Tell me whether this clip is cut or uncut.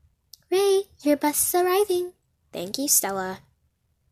uncut